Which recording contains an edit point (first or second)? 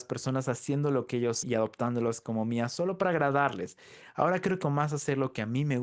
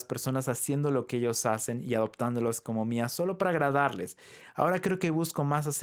first